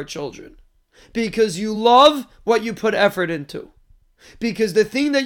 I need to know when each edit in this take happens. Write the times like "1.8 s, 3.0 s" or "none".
none